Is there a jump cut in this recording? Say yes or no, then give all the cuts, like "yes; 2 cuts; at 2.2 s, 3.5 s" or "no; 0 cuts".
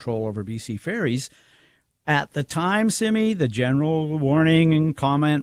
no; 0 cuts